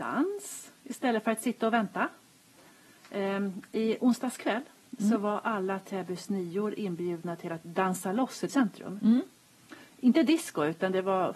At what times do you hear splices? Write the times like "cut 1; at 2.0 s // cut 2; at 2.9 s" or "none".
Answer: cut 1; at 8.5 s